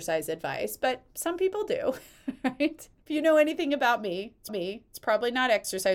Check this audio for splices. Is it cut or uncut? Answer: cut